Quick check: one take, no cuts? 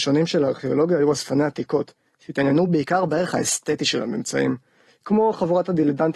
yes; 0 cuts

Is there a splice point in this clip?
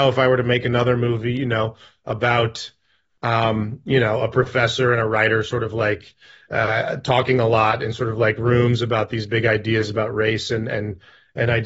no; 0 cuts

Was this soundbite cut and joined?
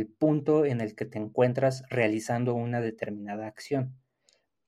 no; 0 cuts

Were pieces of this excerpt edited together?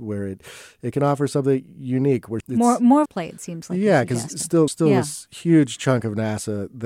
yes; 3 cuts; at 2.4 s, 3.1 s, 4.7 s

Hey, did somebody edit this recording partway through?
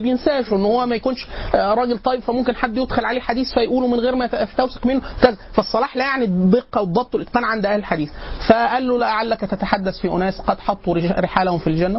no; 0 cuts

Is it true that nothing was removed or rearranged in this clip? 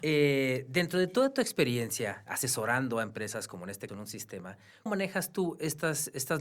no; 3 cuts; at 2.3 s, 3.9 s, 4.9 s

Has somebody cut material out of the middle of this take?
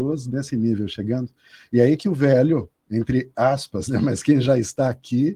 no; 0 cuts

